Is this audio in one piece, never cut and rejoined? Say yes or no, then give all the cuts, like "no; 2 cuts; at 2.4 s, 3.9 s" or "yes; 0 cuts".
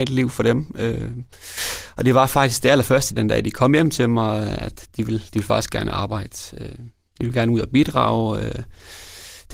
no; 1 cut; at 3.2 s